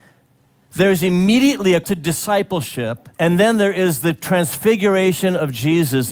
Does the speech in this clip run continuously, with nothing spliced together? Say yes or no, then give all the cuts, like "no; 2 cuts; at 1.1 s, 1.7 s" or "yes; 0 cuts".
no; 2 cuts; at 1.8 s, 3.1 s